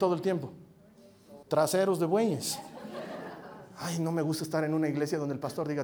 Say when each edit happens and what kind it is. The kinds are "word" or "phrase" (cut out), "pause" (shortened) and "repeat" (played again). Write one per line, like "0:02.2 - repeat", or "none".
0:01.4 - pause